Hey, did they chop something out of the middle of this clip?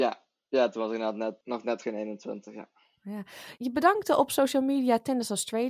no; 0 cuts

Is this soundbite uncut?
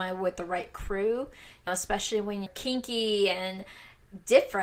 no; 2 cuts; at 1.7 s, 2.5 s

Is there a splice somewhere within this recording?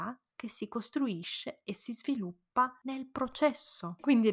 no; 0 cuts

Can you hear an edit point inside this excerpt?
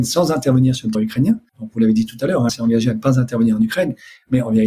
yes; 3 cuts; at 0.9 s, 1.5 s, 2.5 s

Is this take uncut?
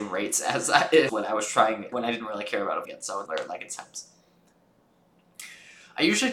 no; 4 cuts; at 1.1 s, 1.9 s, 2.8 s, 3.3 s

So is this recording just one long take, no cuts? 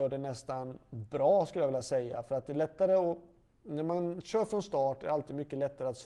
yes; 0 cuts

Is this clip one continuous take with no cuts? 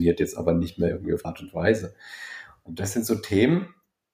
no; 1 cut; at 1.2 s

